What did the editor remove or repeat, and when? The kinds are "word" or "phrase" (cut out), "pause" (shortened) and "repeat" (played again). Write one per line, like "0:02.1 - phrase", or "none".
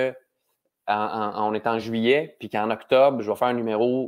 none